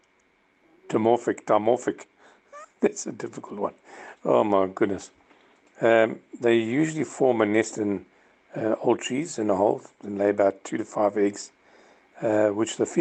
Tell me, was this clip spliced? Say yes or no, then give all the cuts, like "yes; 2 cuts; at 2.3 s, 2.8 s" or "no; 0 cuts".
no; 0 cuts